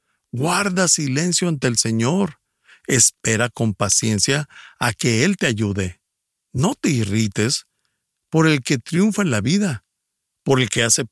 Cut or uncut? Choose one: uncut